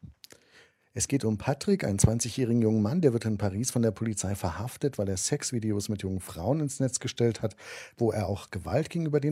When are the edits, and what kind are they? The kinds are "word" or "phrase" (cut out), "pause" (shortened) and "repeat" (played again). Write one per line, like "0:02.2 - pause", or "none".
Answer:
none